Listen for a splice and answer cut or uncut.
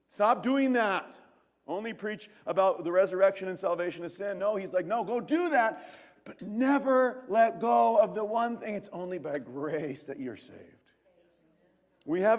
uncut